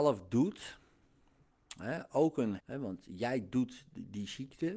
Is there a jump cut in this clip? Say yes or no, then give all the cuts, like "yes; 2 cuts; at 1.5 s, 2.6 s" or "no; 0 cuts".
yes; 1 cut; at 2.6 s